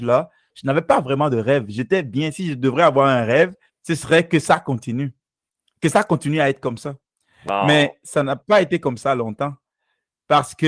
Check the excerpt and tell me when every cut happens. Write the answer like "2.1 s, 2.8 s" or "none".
3.7 s